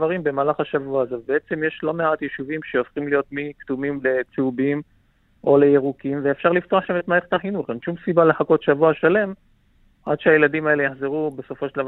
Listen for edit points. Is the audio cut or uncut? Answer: uncut